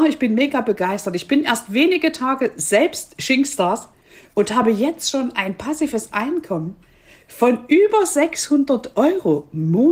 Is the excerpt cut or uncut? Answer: uncut